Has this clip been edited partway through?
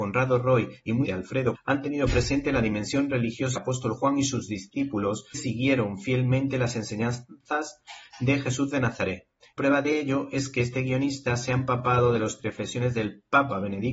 yes; 6 cuts; at 1.0 s, 1.5 s, 3.6 s, 5.3 s, 9.6 s, 12.4 s

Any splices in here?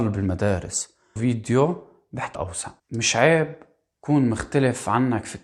yes; 3 cuts; at 1.2 s, 2.3 s, 2.8 s

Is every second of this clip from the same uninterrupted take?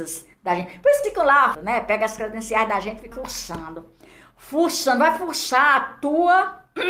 no; 3 cuts; at 1.0 s, 1.5 s, 3.1 s

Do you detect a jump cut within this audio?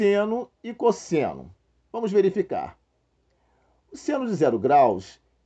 no; 0 cuts

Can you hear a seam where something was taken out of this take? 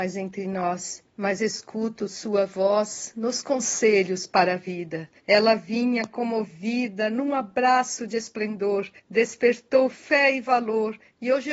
yes; 3 cuts; at 1.1 s, 5.2 s, 9.0 s

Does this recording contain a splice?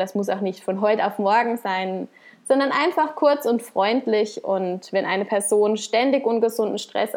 no; 0 cuts

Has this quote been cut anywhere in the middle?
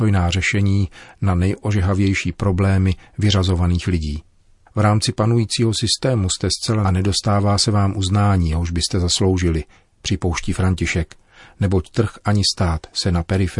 yes; 1 cut; at 6.8 s

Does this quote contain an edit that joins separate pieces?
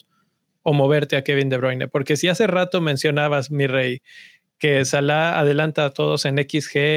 no; 0 cuts

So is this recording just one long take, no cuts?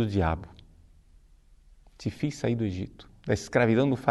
yes; 0 cuts

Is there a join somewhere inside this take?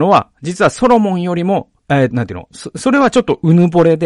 yes; 2 cuts; at 1.8 s, 2.1 s

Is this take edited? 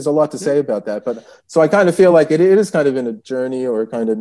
no; 0 cuts

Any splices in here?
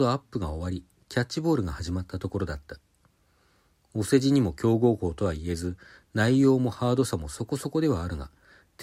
no; 0 cuts

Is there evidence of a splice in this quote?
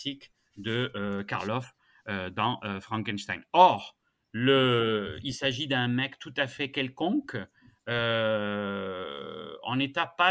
no; 0 cuts

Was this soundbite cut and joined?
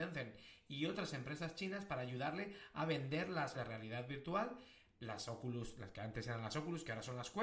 yes; 1 cut; at 3.5 s

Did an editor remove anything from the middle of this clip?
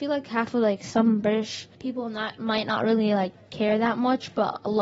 yes; 1 cut; at 1.7 s

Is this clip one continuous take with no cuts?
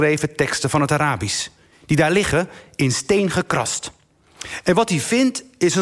yes; 0 cuts

